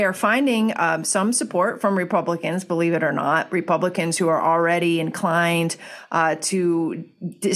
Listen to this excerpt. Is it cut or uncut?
uncut